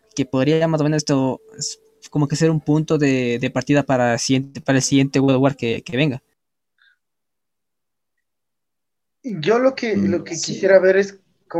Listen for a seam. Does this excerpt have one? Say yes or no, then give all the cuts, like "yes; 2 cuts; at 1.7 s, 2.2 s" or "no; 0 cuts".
no; 0 cuts